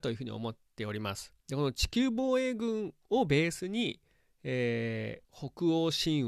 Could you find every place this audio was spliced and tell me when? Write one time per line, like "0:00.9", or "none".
0:01.4
0:05.2